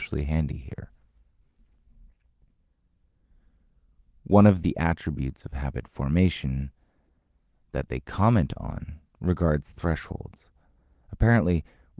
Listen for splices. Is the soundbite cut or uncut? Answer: uncut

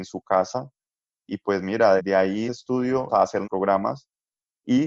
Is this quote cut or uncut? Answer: cut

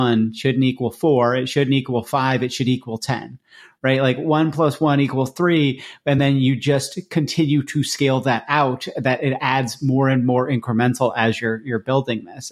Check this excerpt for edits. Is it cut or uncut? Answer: uncut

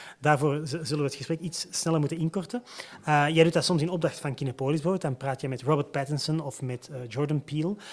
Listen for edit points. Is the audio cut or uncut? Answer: uncut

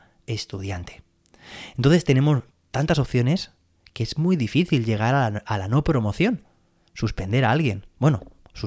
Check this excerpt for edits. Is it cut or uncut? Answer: uncut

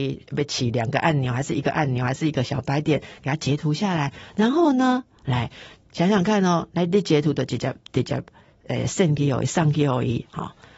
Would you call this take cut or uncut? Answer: uncut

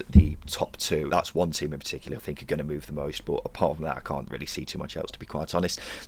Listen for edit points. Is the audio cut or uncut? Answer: cut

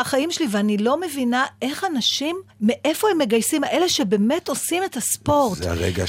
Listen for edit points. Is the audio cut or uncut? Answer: cut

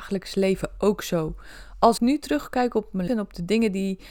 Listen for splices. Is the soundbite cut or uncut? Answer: cut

